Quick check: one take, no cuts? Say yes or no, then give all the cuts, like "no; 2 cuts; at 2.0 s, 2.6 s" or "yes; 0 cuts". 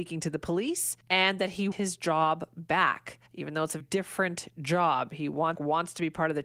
no; 5 cuts; at 1.0 s, 1.7 s, 3.3 s, 3.8 s, 5.5 s